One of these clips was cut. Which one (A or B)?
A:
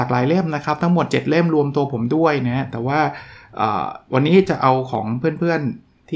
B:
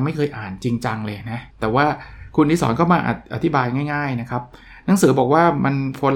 B